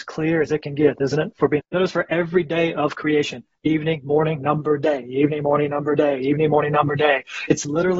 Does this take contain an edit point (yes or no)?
yes